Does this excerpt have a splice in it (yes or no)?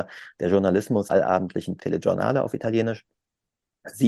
yes